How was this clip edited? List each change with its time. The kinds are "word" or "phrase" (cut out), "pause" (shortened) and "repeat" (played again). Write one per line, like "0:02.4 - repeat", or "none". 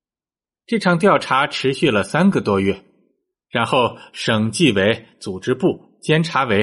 none